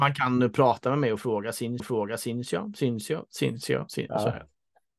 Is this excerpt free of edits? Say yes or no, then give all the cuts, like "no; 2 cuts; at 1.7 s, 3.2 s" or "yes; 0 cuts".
no; 1 cut; at 1.8 s